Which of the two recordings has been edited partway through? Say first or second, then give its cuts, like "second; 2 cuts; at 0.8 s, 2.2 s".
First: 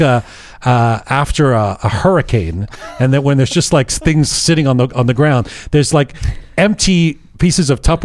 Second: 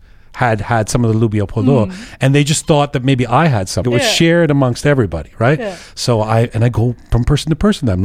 second; 1 cut; at 3.8 s